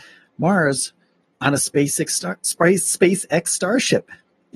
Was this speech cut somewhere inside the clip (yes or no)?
yes